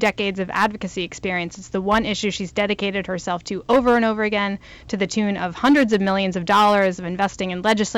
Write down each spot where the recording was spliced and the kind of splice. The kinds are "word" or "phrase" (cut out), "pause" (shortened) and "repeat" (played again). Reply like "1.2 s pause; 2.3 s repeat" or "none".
none